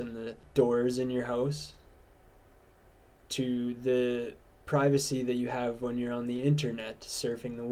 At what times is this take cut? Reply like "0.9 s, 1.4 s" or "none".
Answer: none

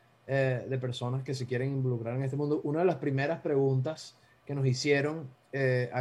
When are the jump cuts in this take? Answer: none

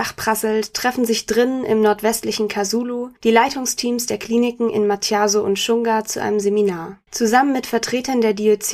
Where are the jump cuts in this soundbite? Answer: 3.2 s, 7.1 s

